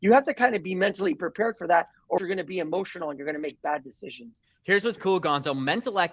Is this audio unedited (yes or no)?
no